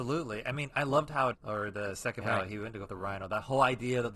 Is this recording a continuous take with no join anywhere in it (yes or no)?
no